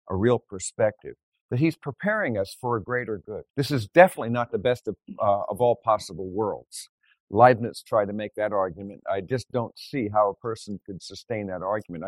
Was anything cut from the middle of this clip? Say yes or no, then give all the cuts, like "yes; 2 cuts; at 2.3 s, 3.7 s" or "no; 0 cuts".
yes; 1 cut; at 3.5 s